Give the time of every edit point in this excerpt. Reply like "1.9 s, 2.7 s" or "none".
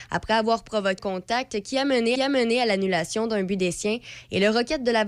1.0 s, 2.2 s